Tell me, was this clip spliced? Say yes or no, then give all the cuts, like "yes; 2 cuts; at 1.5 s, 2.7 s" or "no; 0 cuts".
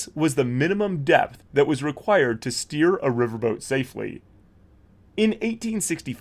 no; 0 cuts